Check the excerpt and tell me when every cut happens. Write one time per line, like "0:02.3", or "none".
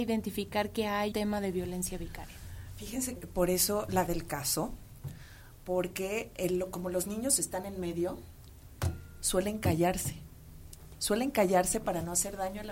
0:01.1
0:03.2
0:04.1